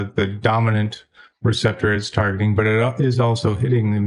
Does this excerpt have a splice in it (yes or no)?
no